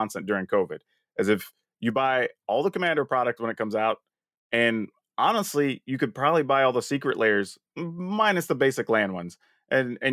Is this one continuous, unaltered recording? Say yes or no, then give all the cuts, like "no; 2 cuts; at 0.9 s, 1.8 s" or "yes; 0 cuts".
yes; 0 cuts